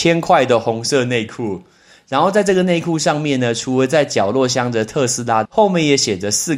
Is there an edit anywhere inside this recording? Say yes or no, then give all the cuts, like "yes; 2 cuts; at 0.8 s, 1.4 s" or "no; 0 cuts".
yes; 1 cut; at 5.5 s